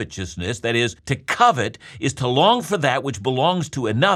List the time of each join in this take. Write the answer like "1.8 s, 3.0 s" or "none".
1.0 s